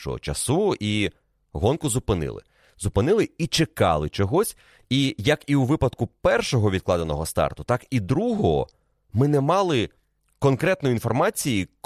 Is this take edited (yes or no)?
no